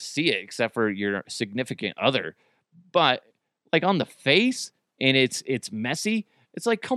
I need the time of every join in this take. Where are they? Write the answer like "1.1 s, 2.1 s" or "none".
none